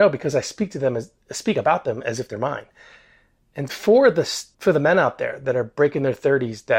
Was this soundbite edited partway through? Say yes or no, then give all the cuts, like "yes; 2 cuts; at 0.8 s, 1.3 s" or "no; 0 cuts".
yes; 2 cuts; at 3.7 s, 4.5 s